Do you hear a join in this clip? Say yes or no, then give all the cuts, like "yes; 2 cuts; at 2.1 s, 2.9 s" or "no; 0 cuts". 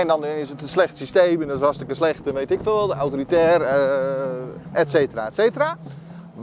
no; 0 cuts